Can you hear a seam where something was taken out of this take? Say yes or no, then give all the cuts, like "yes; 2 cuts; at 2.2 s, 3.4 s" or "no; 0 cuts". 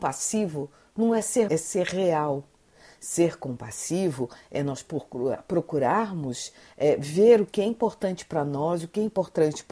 yes; 1 cut; at 1.5 s